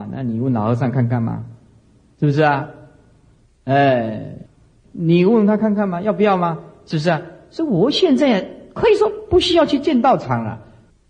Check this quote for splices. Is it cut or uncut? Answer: uncut